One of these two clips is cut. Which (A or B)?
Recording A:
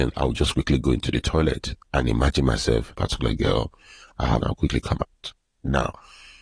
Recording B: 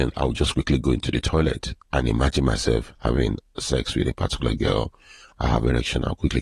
A